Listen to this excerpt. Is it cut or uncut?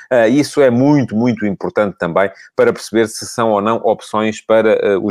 uncut